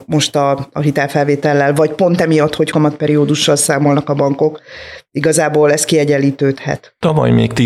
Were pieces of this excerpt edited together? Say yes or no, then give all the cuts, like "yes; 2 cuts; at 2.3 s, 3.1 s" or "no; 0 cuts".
yes; 1 cut; at 2.7 s